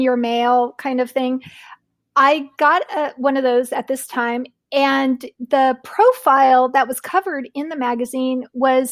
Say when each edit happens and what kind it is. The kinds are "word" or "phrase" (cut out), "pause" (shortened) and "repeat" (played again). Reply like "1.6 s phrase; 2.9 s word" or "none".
none